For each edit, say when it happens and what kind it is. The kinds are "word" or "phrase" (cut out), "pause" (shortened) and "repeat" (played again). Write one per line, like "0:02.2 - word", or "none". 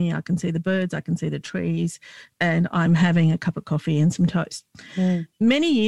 none